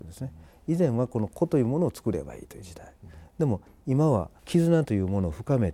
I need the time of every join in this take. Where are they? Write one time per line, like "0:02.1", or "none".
none